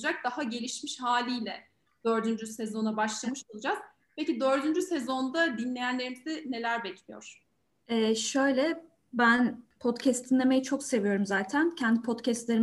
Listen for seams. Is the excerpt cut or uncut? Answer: uncut